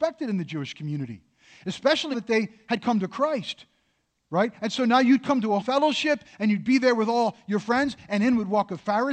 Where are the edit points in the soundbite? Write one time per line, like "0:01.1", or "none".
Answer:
0:02.1
0:05.6